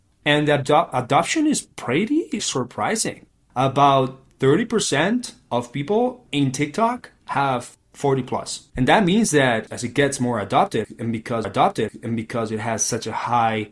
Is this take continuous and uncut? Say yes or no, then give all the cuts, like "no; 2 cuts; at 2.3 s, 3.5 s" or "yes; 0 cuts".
no; 3 cuts; at 2.4 s, 8.7 s, 11.4 s